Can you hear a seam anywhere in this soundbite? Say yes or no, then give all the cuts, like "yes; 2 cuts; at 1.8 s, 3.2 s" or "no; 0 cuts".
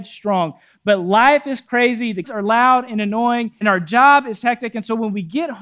yes; 2 cuts; at 2.2 s, 3.6 s